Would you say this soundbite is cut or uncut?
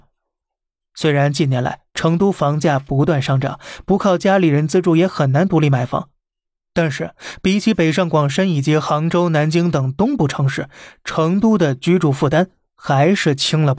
uncut